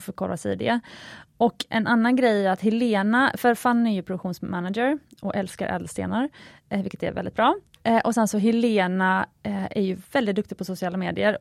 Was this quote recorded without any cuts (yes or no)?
yes